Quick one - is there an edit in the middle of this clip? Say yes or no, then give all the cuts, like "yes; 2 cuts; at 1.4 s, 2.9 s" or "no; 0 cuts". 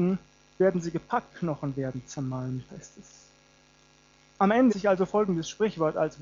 yes; 4 cuts; at 1.3 s, 2.7 s, 3.6 s, 4.7 s